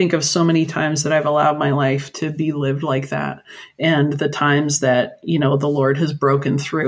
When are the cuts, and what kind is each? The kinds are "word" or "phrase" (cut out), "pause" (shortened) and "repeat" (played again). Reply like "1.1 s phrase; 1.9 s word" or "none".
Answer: none